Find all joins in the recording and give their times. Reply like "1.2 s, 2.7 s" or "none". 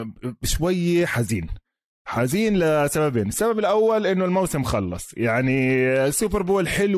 none